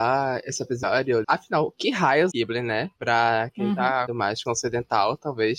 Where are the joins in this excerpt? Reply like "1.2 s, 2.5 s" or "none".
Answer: 1.2 s, 2.3 s, 3.0 s, 4.1 s, 4.5 s